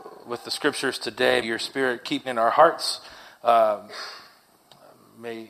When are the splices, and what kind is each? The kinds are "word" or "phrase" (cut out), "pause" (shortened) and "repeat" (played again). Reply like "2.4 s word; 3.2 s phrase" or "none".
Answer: 1.4 s word; 2.2 s word